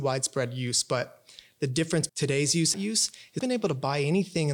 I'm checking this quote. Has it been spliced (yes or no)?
yes